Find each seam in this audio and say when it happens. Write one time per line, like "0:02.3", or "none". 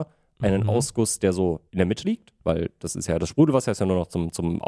0:01.7
0:02.0